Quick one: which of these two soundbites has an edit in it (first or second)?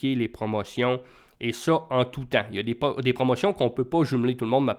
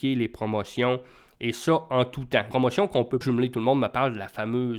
second